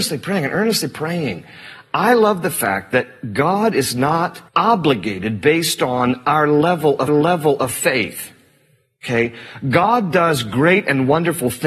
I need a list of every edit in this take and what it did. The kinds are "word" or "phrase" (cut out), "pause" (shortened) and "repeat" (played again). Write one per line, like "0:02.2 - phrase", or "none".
0:04.5 - pause
0:07.1 - repeat